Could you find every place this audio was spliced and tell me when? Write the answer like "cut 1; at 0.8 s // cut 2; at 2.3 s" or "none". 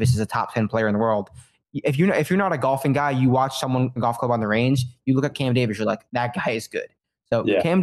cut 1; at 4.0 s